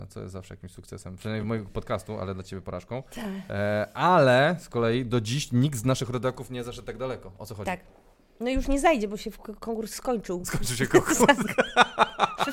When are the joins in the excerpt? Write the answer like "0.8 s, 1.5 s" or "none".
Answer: none